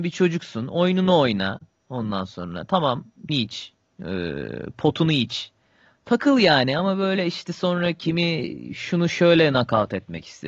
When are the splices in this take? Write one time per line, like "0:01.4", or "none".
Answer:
0:03.3